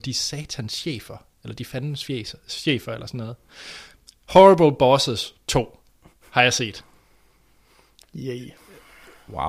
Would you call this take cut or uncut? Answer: uncut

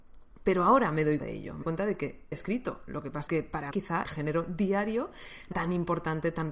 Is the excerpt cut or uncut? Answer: cut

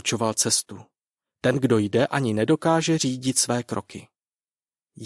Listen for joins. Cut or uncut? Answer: uncut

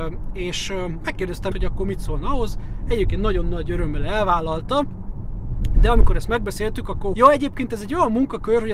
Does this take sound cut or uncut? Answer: cut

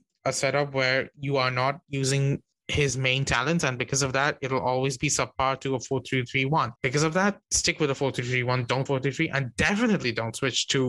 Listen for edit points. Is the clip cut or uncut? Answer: cut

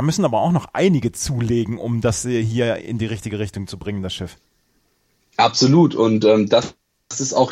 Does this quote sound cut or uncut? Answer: uncut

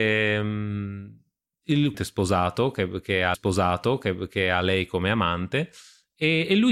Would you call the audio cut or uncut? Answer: cut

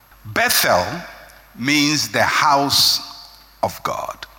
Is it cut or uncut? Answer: uncut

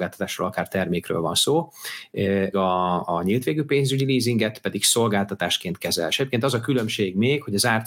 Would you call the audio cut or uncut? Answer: cut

